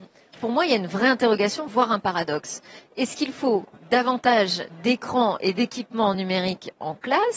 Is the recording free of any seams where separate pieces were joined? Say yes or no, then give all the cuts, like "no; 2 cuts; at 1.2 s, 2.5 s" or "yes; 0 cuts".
yes; 0 cuts